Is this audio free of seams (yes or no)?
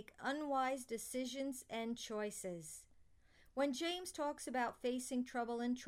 yes